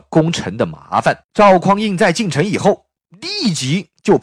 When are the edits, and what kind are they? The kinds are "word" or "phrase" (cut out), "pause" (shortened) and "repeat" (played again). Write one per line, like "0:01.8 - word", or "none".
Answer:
0:01.2 - pause